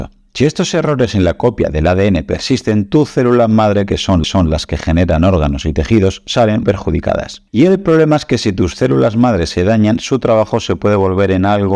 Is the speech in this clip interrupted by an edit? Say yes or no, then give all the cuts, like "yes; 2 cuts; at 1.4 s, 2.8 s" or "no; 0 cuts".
yes; 2 cuts; at 4.2 s, 6.6 s